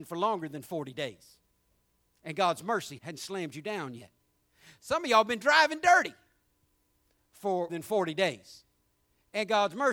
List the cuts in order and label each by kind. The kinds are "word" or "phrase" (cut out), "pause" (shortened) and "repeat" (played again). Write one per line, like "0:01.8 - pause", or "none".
0:03.0 - word
0:07.7 - word